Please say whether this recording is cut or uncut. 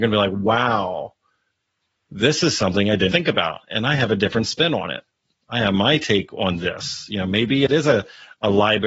cut